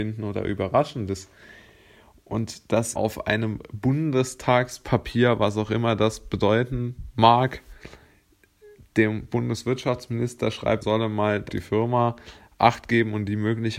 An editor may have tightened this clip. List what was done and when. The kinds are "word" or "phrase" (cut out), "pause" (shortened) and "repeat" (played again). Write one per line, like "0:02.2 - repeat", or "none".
0:03.0 - word
0:10.8 - word
0:11.5 - word